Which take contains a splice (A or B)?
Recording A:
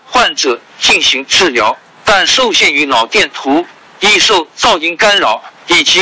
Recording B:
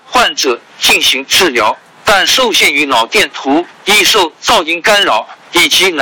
B